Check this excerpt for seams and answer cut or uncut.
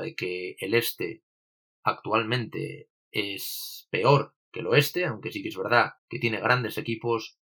cut